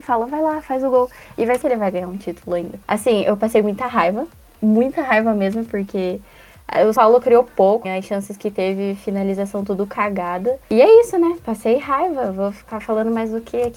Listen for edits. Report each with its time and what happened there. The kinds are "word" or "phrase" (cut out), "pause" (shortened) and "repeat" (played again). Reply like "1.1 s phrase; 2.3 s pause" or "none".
1.6 s word; 2.8 s pause; 7.0 s word; 7.8 s word

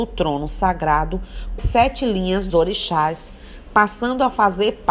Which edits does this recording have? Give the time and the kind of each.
1.6 s word; 2.5 s word

